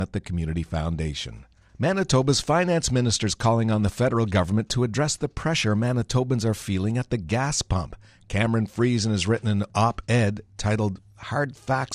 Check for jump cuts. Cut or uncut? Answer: uncut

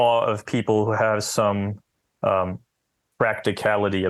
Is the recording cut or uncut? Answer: cut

